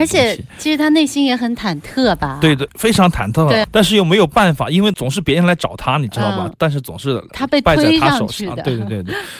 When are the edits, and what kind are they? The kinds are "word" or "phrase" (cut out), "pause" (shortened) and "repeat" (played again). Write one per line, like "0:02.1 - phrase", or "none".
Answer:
0:03.6 - phrase